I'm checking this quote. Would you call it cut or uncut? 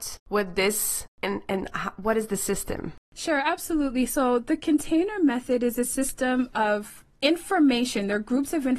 uncut